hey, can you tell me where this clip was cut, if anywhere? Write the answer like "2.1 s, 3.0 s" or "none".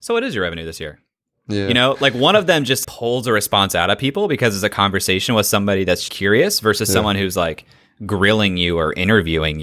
2.8 s, 6.1 s